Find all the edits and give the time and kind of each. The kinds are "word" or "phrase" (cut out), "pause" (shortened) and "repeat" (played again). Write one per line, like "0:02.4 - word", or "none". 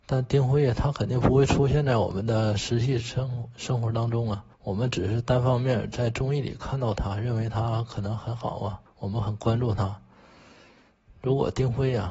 0:04.5 - pause
0:08.9 - pause